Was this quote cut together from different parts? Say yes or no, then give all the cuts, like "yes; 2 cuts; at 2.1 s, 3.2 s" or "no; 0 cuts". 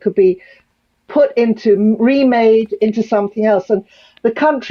no; 0 cuts